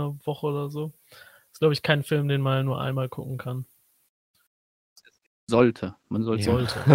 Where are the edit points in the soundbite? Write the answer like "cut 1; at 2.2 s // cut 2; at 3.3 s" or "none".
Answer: none